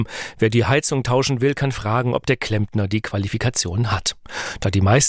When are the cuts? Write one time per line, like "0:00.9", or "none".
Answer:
none